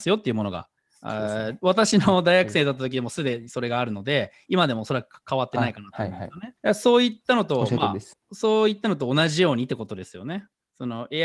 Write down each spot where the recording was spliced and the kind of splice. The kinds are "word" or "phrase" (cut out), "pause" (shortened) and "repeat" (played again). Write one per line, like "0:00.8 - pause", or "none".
0:06.6 - pause
0:08.1 - pause